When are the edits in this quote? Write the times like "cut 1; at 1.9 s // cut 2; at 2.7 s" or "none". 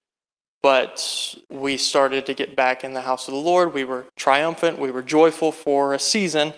cut 1; at 1.4 s // cut 2; at 4.1 s